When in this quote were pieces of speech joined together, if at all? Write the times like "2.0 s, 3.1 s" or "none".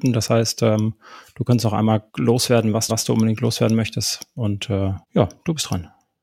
2.1 s, 2.9 s, 5.0 s